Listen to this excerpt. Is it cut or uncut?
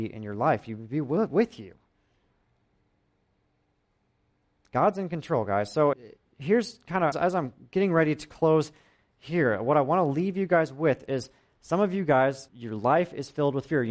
cut